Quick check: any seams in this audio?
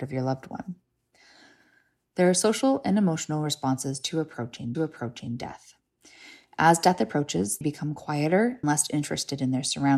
yes; 3 cuts; at 4.7 s, 7.6 s, 8.6 s

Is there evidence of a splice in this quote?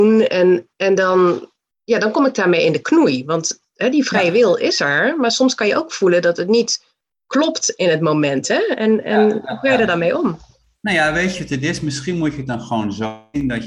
no; 0 cuts

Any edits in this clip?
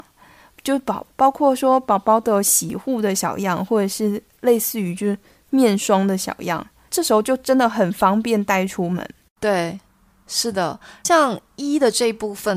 no; 0 cuts

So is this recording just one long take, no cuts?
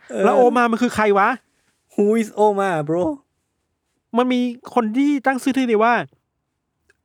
yes; 0 cuts

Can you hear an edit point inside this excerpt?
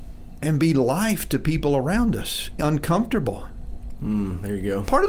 yes; 1 cut; at 2.6 s

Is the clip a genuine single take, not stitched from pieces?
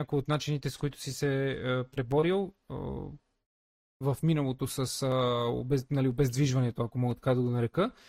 yes; 0 cuts

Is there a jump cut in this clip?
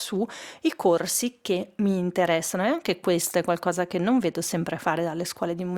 no; 0 cuts

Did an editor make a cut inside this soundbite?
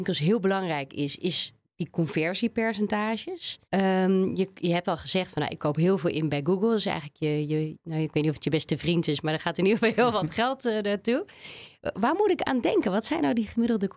yes; 1 cut; at 3.6 s

